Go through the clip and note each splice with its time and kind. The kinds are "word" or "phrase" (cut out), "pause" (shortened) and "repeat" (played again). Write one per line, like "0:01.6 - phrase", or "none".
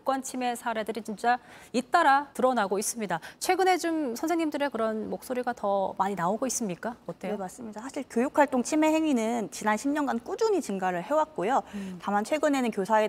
0:02.3 - pause